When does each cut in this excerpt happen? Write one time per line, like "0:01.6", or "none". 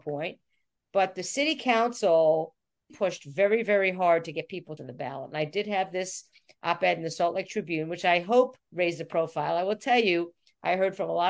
0:02.9
0:04.8
0:08.6